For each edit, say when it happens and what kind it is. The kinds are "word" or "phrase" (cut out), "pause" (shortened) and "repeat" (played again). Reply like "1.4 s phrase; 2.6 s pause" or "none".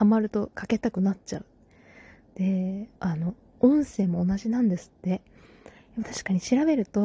3.0 s pause